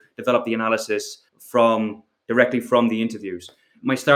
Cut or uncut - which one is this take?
cut